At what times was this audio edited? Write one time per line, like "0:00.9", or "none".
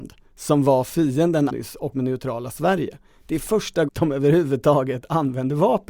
0:01.5
0:01.9
0:03.9